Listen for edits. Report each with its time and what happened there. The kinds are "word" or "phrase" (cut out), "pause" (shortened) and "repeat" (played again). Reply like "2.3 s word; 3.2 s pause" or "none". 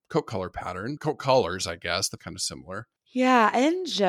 1.0 s word; 2.2 s word; 3.0 s pause